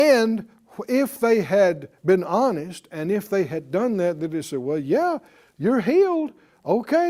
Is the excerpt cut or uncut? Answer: uncut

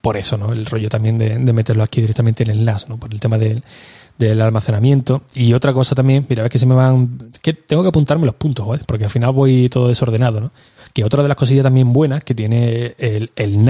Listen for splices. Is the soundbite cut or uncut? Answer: uncut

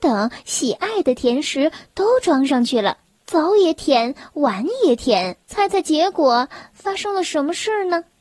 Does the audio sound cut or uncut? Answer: cut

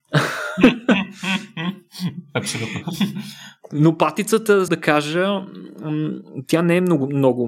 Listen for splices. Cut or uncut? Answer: cut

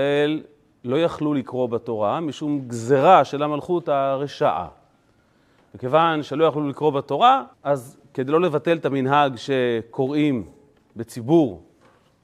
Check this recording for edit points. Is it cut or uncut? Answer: cut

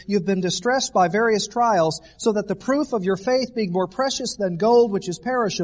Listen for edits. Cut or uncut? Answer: uncut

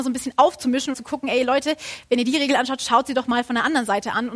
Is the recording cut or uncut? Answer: cut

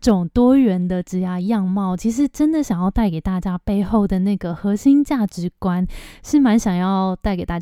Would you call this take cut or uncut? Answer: uncut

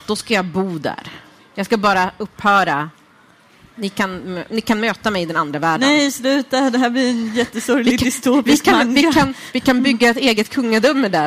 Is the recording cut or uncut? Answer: uncut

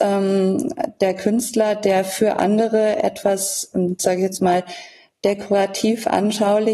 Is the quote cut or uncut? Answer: uncut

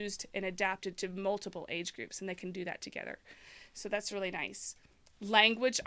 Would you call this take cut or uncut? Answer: uncut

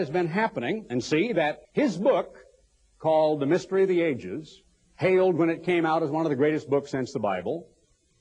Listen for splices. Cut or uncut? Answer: cut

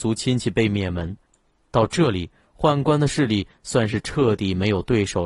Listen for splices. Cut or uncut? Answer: uncut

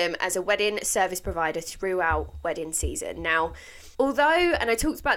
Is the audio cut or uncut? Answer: cut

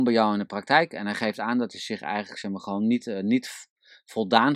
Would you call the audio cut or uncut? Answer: uncut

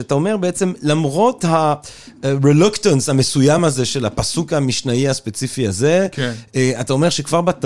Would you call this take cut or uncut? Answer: uncut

